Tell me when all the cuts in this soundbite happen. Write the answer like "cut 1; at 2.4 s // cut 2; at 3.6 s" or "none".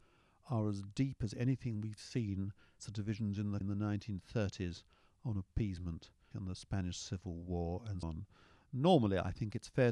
cut 1; at 2.8 s // cut 2; at 3.6 s // cut 3; at 6.3 s // cut 4; at 8.0 s